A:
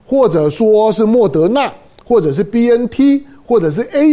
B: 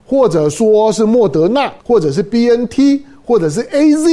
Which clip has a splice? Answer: B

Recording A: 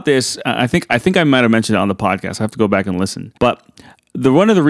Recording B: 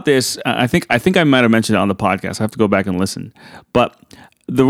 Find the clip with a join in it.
A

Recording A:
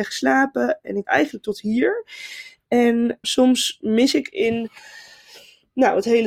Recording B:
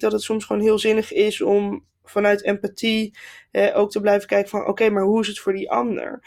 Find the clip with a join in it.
A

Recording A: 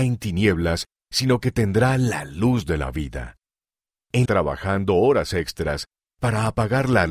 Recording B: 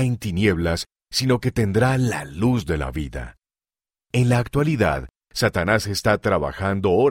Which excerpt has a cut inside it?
A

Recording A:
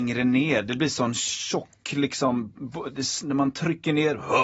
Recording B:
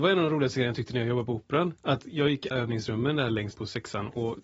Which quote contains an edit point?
B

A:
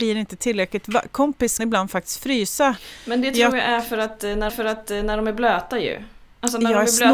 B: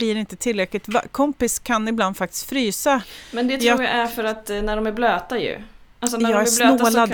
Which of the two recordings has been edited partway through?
A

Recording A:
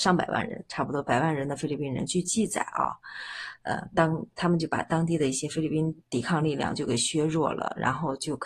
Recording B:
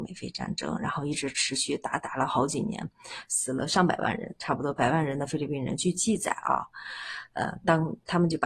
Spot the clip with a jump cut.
A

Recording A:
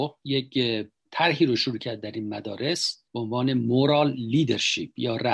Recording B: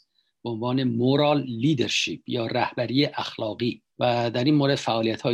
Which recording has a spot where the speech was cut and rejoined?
A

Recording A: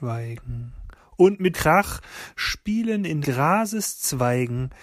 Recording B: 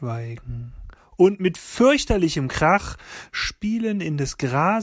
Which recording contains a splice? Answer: A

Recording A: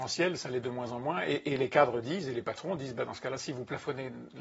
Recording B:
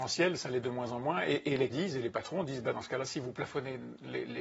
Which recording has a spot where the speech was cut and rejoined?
B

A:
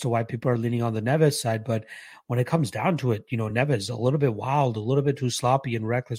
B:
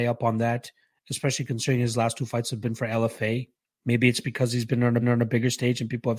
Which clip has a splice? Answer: B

